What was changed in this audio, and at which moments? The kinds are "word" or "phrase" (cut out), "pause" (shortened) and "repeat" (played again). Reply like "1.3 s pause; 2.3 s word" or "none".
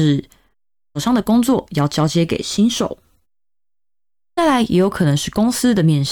none